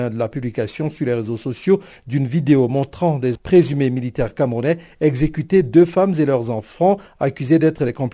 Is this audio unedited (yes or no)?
no